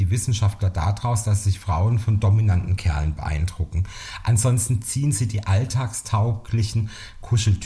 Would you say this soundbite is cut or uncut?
uncut